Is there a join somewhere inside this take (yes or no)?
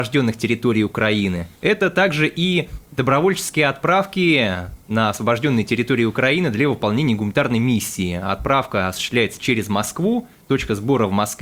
yes